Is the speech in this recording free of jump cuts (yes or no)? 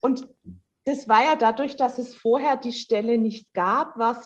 yes